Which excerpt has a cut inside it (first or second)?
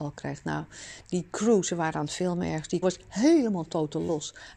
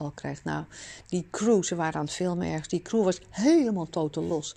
first